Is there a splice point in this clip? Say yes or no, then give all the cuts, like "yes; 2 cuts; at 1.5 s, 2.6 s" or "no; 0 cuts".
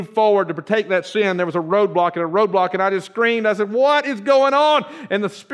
no; 0 cuts